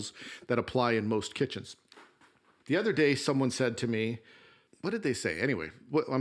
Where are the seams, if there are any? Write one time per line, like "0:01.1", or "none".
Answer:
0:02.6